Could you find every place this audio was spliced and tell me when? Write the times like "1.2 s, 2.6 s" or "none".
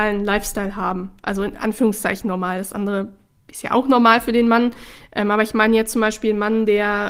none